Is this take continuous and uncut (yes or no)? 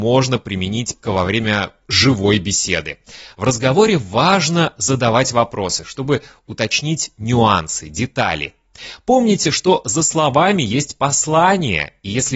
no